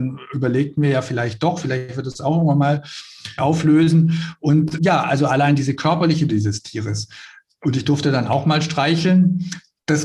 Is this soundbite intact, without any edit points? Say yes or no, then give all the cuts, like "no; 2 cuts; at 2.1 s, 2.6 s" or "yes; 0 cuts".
no; 3 cuts; at 3.4 s, 4.8 s, 6.3 s